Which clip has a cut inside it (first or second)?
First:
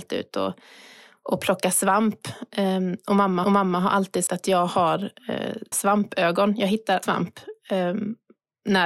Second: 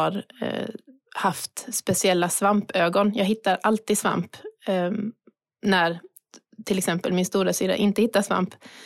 first